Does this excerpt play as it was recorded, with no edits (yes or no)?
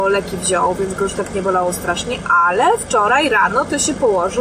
yes